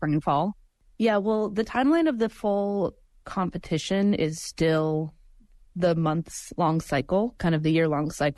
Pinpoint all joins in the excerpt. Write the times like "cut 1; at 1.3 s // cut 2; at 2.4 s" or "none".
none